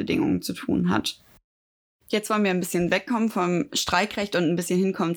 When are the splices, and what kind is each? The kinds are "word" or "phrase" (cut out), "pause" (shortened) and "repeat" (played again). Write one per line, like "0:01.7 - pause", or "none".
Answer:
none